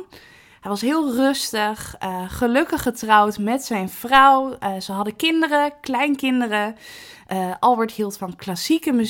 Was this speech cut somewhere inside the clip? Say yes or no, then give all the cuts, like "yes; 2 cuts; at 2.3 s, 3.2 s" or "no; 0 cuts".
no; 0 cuts